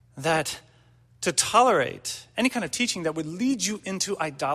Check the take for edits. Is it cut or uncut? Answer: uncut